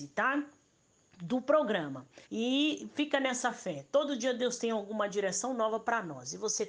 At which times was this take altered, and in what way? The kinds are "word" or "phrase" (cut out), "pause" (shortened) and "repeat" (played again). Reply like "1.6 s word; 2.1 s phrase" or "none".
2.2 s pause